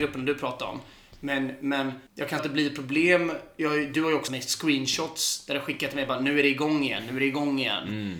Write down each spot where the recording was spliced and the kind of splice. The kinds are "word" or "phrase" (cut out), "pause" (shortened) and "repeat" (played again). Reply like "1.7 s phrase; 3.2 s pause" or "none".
2.1 s pause; 2.4 s phrase; 4.3 s word